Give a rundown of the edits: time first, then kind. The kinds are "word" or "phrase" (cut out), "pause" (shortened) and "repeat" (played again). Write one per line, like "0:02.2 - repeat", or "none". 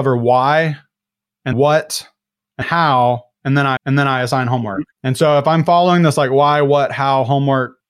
0:01.5 - word
0:02.6 - word
0:03.8 - repeat
0:04.9 - pause